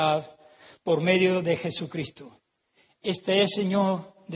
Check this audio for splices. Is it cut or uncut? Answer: uncut